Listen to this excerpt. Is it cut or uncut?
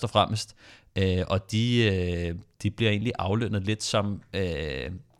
uncut